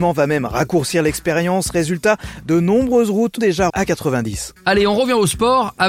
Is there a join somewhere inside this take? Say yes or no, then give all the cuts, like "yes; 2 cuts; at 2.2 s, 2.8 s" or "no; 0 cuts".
yes; 3 cuts; at 3.4 s, 3.7 s, 4.6 s